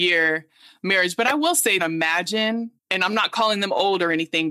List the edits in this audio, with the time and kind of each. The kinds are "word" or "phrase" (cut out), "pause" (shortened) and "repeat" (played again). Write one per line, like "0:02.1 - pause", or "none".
0:01.8 - phrase
0:02.8 - pause